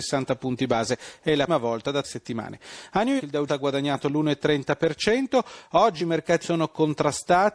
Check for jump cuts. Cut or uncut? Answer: cut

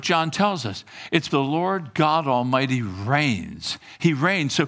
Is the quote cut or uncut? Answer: cut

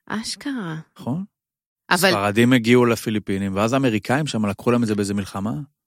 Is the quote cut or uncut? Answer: uncut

